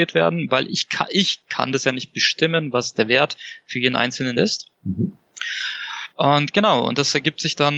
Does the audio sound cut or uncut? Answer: cut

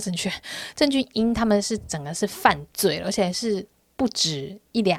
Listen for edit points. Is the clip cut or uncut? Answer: uncut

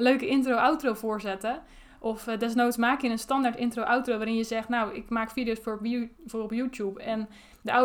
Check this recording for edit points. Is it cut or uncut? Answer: uncut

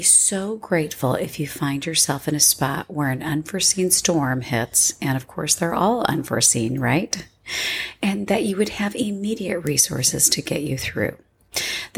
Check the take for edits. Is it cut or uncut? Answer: uncut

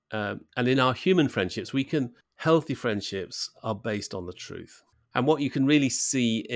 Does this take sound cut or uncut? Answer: cut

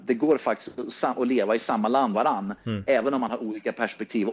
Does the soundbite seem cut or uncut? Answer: cut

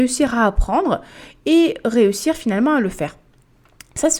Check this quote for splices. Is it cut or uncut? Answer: uncut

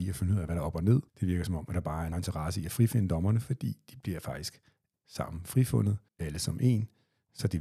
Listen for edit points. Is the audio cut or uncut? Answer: cut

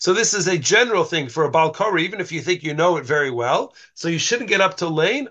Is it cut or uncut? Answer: uncut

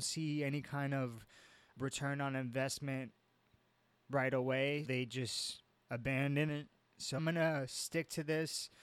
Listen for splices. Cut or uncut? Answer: cut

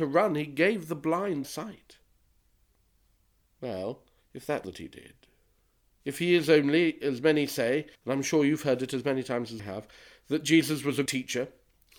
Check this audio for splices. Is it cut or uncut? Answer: cut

